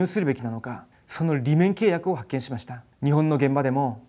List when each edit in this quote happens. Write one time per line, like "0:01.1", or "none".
0:00.9
0:02.9